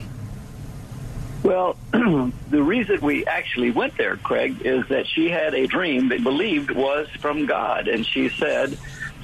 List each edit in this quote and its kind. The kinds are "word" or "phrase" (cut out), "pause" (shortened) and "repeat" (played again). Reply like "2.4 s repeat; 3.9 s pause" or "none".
3.0 s word; 5.7 s word; 6.2 s word